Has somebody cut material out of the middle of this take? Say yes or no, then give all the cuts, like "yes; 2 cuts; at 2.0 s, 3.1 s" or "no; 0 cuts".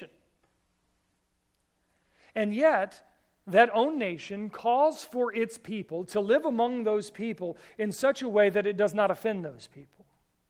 no; 0 cuts